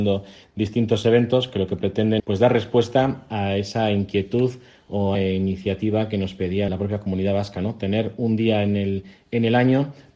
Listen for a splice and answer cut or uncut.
cut